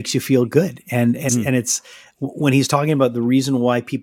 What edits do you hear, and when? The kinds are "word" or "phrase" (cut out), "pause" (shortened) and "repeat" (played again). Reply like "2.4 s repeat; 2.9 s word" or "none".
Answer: 1.3 s word

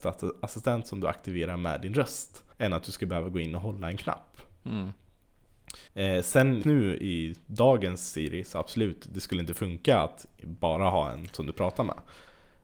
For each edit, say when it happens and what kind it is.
2.5 s pause; 5.9 s pause; 6.6 s word

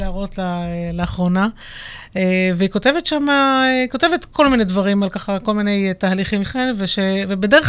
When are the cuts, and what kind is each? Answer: 6.4 s phrase

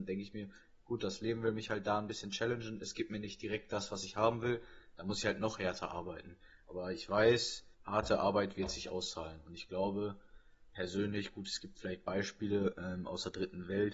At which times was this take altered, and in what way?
7.7 s pause; 10.7 s pause

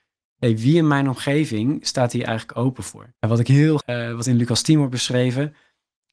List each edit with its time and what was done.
3.2 s pause; 3.8 s phrase

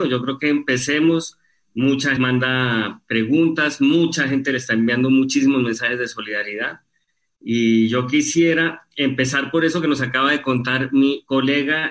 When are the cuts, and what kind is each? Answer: 2.2 s word

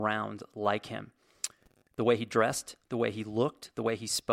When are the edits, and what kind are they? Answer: none

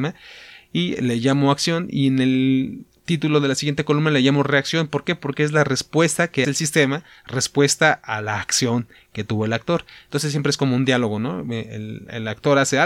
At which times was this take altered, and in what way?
6.4 s word

